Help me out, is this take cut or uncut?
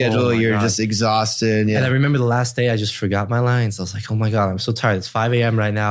uncut